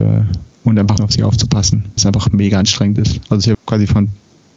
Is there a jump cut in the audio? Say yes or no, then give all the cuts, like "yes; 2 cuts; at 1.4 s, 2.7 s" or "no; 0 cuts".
yes; 3 cuts; at 1.0 s, 2.0 s, 3.5 s